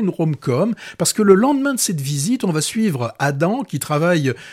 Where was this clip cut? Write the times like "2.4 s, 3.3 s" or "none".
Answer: none